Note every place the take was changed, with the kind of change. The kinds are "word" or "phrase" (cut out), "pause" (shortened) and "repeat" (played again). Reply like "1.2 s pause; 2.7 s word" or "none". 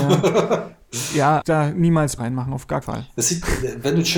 1.4 s word; 2.2 s word; 2.8 s word